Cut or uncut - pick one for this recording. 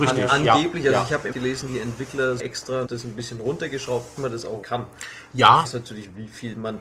cut